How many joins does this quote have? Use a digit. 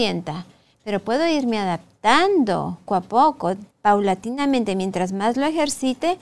2